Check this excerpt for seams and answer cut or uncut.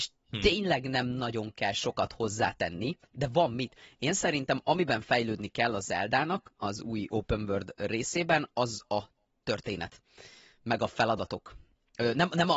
uncut